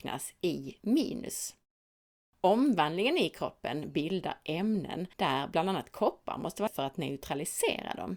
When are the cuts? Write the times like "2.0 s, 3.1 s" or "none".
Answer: 5.1 s, 6.7 s